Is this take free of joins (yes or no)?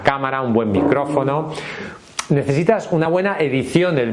yes